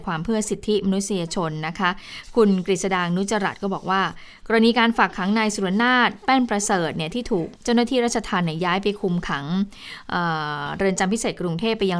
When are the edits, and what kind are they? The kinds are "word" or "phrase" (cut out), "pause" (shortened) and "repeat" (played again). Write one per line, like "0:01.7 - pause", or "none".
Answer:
0:07.5 - pause